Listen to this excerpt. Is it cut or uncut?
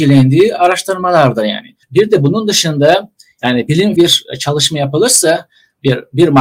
cut